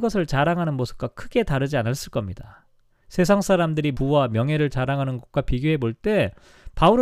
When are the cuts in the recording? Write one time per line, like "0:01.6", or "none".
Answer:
0:03.9

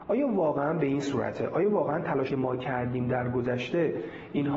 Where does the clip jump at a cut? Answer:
0:02.3

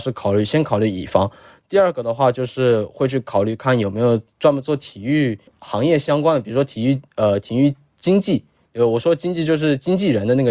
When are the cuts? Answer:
0:05.5

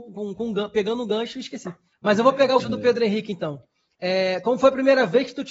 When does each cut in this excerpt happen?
0:01.9
0:02.6

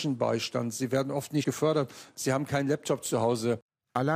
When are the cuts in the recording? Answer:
0:01.4

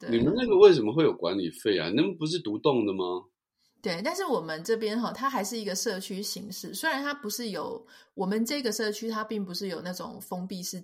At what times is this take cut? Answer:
none

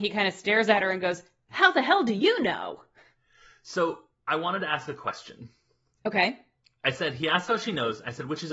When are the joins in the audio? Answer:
none

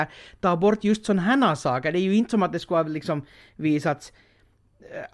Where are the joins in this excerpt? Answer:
none

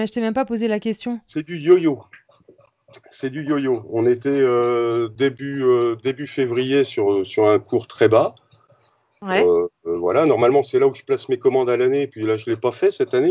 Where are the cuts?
none

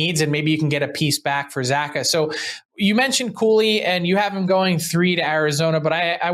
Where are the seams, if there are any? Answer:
0:02.6

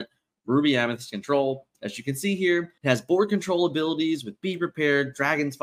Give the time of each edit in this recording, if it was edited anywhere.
0:02.8

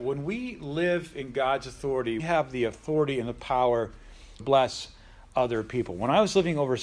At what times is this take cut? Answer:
0:02.2
0:04.4

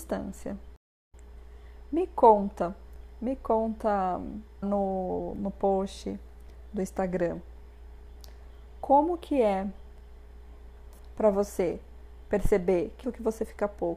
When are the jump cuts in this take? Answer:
0:04.6
0:13.0

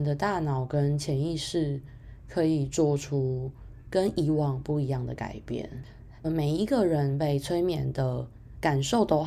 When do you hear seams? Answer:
0:06.2

